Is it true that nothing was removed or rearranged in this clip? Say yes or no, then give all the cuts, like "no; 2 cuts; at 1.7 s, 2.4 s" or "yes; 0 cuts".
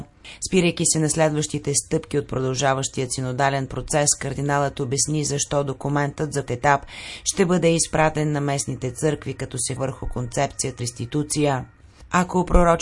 no; 3 cuts; at 6.5 s, 9.8 s, 10.8 s